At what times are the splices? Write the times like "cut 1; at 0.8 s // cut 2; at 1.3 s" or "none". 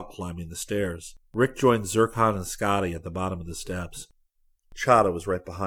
cut 1; at 1.2 s